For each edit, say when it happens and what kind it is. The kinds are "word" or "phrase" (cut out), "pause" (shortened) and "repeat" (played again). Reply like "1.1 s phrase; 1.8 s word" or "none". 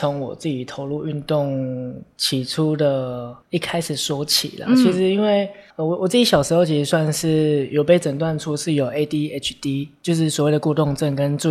3.4 s pause; 5.7 s pause

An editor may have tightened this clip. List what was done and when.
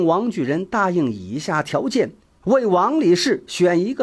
none

